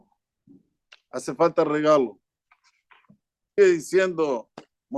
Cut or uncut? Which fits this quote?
cut